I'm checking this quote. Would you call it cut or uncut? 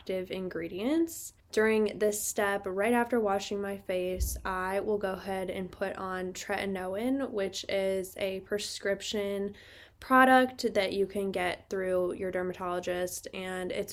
cut